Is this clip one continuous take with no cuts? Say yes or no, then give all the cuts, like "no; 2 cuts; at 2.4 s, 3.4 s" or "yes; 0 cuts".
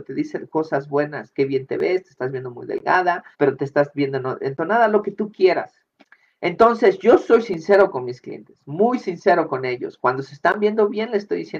no; 2 cuts; at 3.3 s, 6.0 s